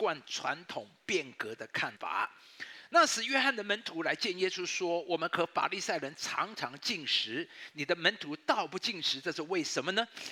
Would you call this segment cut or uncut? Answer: cut